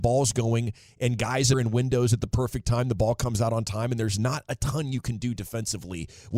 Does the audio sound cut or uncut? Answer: cut